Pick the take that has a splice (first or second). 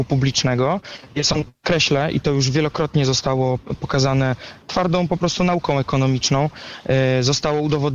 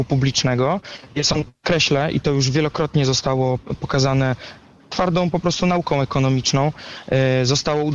first